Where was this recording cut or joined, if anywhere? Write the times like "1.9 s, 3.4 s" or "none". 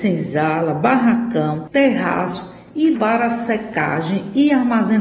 2.9 s